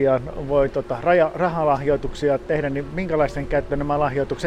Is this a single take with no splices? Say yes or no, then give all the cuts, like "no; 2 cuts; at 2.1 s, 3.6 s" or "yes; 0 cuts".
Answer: yes; 0 cuts